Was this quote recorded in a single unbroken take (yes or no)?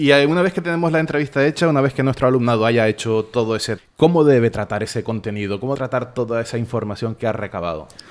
no